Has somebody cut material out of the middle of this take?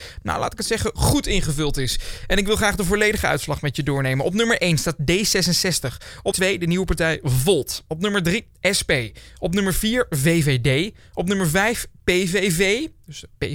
yes; 1 cut; at 6.3 s

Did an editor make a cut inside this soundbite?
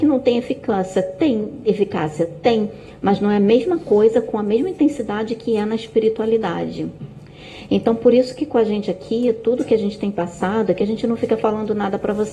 no; 0 cuts

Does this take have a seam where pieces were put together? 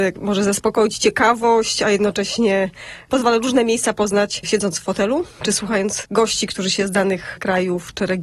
yes; 1 cut; at 5.3 s

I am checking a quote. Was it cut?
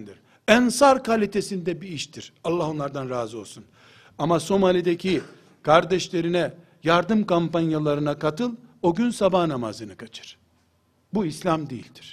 no; 0 cuts

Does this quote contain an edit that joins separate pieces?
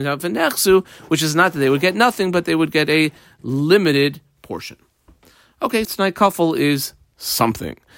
yes; 1 cut; at 5.8 s

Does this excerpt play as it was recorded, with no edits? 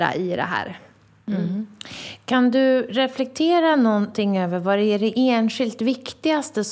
yes; 0 cuts

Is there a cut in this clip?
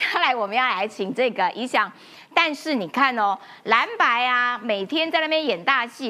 no; 0 cuts

